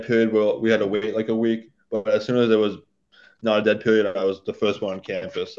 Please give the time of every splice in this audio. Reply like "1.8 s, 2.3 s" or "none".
none